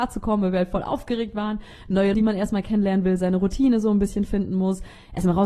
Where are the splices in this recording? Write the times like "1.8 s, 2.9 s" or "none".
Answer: 2.1 s